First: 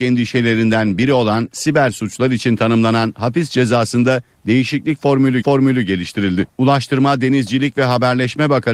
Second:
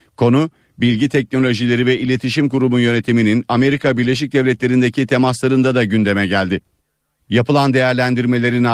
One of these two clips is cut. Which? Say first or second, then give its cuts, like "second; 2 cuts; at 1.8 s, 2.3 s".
first; 1 cut; at 5.4 s